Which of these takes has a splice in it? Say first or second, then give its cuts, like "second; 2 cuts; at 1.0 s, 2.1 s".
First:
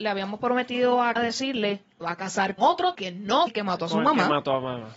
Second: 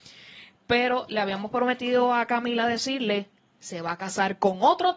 first; 5 cuts; at 1.2 s, 2.0 s, 2.6 s, 2.9 s, 3.5 s